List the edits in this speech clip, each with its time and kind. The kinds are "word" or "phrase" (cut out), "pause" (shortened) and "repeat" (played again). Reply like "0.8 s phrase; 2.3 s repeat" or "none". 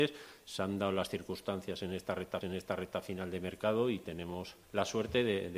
2.4 s repeat; 4.6 s pause